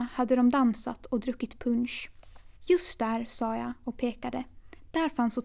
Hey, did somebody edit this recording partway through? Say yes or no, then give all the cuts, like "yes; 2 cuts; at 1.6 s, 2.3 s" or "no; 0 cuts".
yes; 1 cut; at 2.6 s